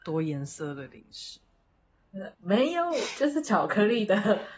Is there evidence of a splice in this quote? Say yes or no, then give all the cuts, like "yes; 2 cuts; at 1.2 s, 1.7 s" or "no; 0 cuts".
yes; 1 cut; at 2.3 s